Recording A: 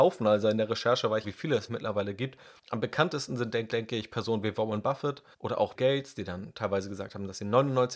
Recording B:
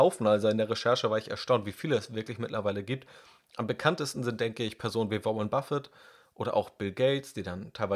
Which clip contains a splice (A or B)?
A